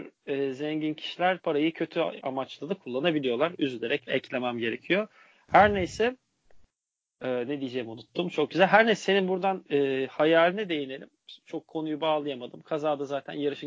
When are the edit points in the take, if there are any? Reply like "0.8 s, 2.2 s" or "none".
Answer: 2.2 s, 4.1 s